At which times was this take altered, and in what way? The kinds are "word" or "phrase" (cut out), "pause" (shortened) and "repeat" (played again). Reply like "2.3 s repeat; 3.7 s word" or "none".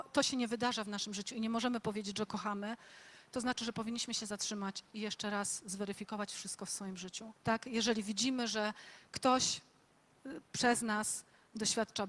7.4 s pause